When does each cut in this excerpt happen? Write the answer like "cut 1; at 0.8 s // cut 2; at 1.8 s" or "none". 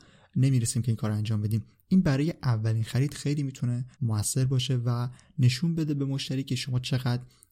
cut 1; at 3.9 s